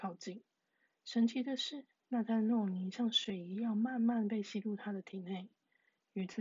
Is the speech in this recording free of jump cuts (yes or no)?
no